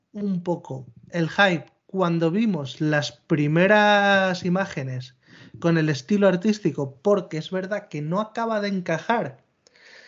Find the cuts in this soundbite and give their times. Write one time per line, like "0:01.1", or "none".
none